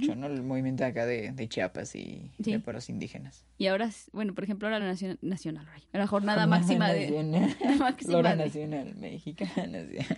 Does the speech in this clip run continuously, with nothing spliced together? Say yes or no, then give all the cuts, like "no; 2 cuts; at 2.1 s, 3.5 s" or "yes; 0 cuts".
no; 4 cuts; at 2.7 s, 4.1 s, 4.8 s, 5.9 s